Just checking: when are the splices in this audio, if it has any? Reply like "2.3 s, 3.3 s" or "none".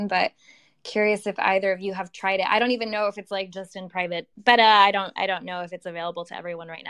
4.3 s